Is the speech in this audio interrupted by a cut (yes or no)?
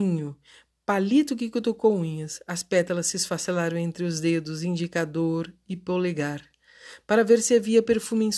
no